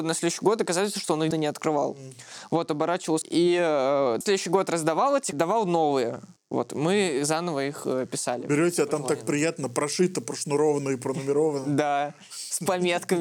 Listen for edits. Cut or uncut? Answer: cut